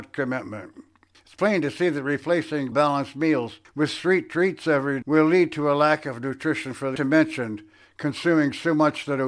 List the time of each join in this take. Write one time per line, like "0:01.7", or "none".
0:02.7
0:05.0
0:07.0